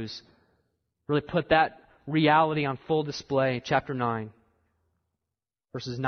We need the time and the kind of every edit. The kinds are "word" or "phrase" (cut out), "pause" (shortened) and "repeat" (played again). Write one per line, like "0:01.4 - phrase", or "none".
none